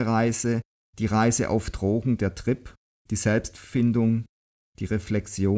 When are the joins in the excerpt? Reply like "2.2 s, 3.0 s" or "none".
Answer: none